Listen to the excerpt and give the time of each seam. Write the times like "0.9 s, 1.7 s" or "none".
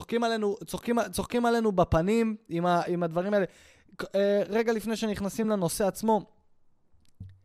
none